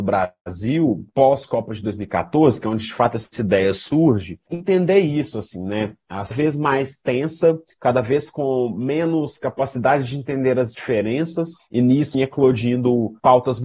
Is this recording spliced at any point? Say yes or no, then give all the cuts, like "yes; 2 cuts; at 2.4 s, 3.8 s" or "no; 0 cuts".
yes; 2 cuts; at 6.3 s, 12.1 s